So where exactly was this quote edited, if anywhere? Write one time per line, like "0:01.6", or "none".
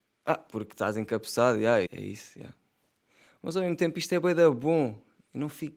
0:01.9